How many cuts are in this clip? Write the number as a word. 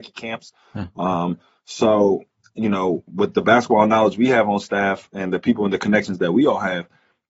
zero